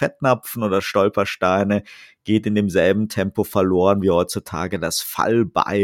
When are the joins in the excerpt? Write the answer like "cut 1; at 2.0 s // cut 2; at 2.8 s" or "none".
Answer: none